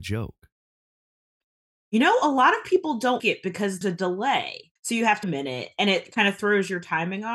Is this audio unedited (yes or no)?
no